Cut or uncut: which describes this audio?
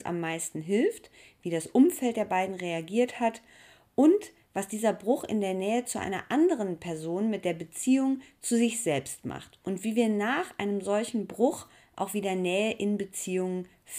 uncut